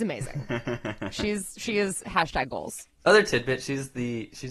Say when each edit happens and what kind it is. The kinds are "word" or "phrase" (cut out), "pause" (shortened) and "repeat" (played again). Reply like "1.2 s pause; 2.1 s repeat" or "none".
2.9 s pause